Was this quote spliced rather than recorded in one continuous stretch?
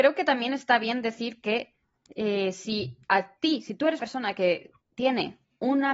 yes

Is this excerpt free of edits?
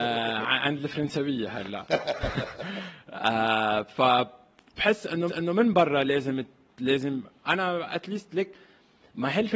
no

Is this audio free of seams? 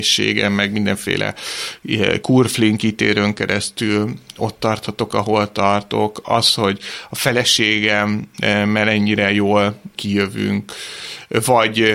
yes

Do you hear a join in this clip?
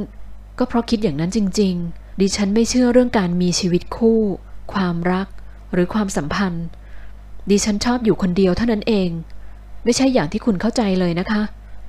yes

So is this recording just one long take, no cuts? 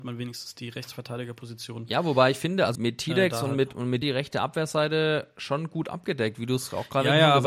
no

